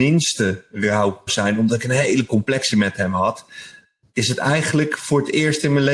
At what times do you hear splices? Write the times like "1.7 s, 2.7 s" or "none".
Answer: 1.3 s, 2.7 s